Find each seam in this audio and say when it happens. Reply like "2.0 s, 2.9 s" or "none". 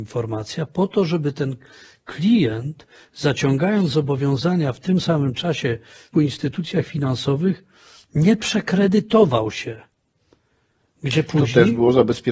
6.1 s